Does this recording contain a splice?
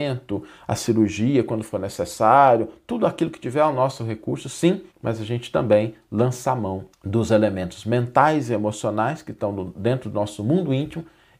yes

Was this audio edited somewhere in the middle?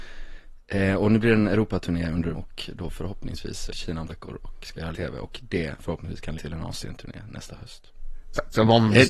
yes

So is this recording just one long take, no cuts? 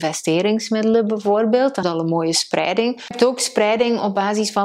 no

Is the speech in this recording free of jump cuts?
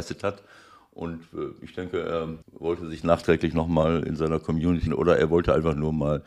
no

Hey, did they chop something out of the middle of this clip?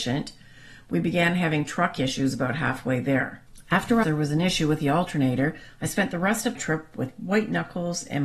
yes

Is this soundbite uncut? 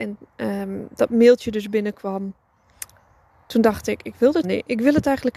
no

